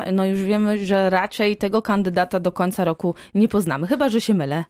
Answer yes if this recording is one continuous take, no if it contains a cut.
yes